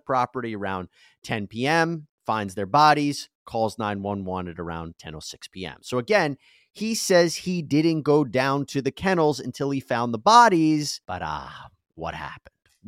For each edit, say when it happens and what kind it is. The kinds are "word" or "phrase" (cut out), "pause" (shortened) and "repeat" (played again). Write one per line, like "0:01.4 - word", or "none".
0:11.0 - pause